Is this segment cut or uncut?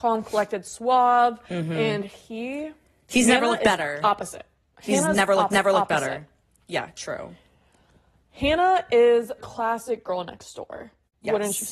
cut